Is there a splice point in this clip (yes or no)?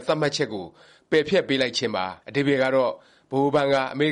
yes